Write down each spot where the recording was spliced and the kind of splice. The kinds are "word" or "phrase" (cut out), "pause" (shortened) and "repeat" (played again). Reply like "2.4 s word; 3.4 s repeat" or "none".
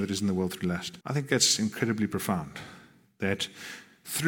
1.0 s pause

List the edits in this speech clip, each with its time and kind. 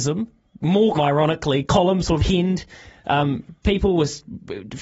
0.9 s word; 2.2 s word

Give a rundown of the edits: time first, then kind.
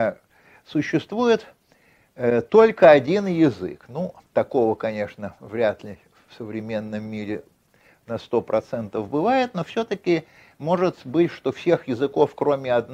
none

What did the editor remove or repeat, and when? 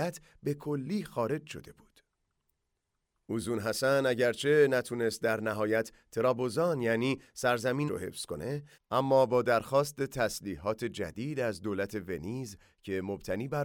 7.9 s phrase

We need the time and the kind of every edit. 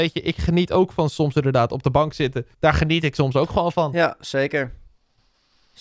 2.5 s pause

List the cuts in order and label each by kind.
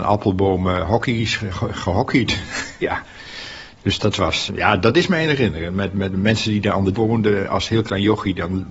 2.8 s word; 4.5 s word; 6.9 s word

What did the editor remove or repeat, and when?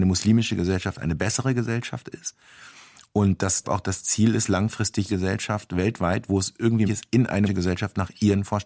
3.6 s word; 5.1 s word; 6.9 s word; 7.5 s word

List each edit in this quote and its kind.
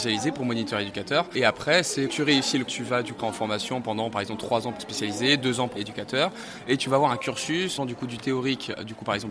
2.1 s word; 2.7 s word; 3.2 s word; 4.8 s word; 5.8 s word; 7.8 s word

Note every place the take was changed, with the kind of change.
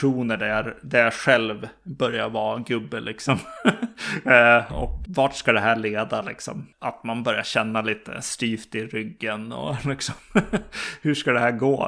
4.7 s word; 5.0 s word

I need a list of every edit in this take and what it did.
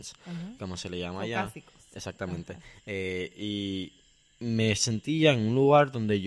none

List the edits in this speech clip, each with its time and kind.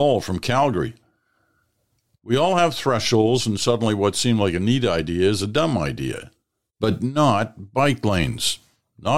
none

